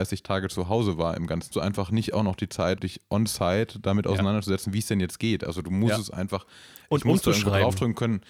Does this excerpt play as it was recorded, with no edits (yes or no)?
no